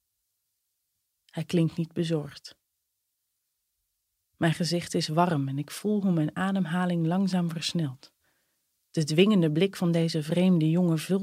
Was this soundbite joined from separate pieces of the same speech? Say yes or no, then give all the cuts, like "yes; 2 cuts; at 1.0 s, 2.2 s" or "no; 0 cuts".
no; 0 cuts